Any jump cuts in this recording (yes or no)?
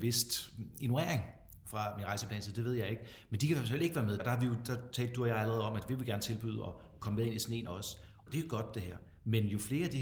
yes